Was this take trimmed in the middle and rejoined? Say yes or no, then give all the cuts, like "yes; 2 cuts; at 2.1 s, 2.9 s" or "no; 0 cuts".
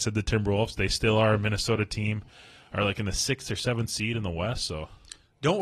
no; 0 cuts